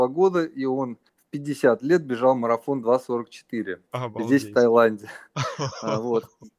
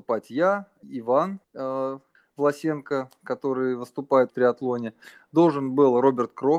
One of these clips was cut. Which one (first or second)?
second